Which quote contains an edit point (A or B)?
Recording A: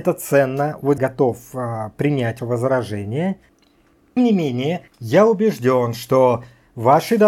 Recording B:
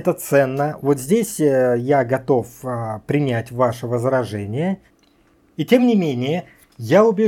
A